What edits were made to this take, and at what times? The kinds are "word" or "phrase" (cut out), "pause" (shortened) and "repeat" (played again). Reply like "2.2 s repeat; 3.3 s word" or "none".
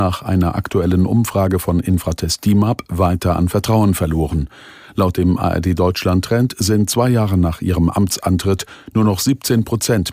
none